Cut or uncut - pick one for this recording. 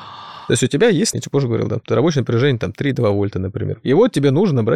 cut